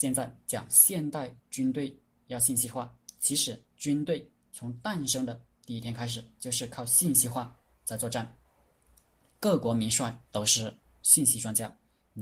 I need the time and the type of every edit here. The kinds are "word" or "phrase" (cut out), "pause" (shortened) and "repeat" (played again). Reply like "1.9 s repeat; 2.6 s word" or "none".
1.4 s pause; 10.3 s pause